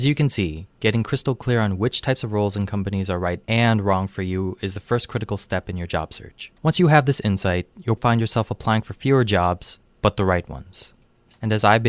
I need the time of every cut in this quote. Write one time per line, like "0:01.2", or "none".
0:03.4
0:06.6
0:08.0